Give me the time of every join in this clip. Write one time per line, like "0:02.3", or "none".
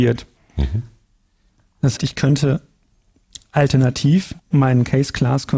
0:02.0
0:04.4